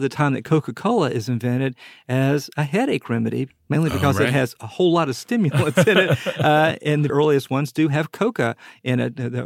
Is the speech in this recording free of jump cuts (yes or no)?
no